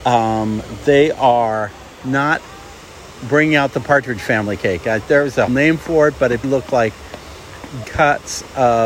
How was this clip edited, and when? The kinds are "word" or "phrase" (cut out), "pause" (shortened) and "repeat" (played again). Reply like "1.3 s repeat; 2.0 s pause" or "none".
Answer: 5.5 s word; 6.4 s word; 7.8 s word

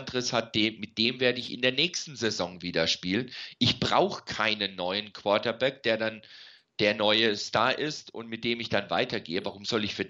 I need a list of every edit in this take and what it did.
none

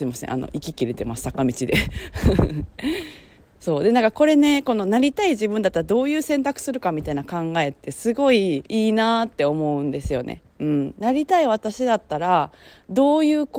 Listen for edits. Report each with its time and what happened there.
8.7 s pause

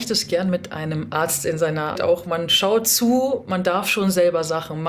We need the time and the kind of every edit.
1.9 s word

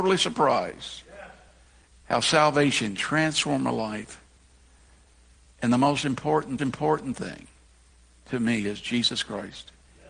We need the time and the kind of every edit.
1.8 s pause; 3.0 s word; 6.6 s repeat

